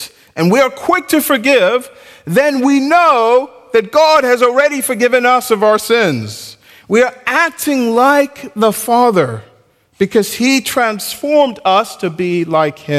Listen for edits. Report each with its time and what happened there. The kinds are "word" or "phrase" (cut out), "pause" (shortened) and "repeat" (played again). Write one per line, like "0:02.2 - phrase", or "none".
none